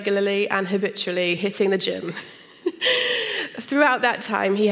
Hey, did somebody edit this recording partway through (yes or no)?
no